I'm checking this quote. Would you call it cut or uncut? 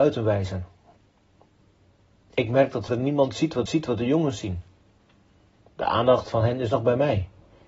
cut